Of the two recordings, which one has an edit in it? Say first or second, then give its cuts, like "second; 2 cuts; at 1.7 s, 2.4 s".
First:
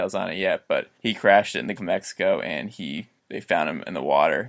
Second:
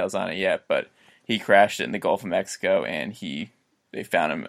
first; 3 cuts; at 0.9 s, 1.8 s, 3.2 s